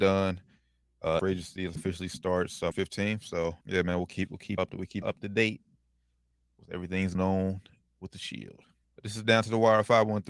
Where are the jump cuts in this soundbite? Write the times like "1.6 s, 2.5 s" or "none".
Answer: 1.2 s, 1.8 s, 2.7 s, 3.6 s, 4.6 s, 5.0 s, 7.1 s, 8.8 s